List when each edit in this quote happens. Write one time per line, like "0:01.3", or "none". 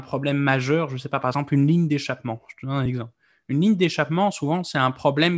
none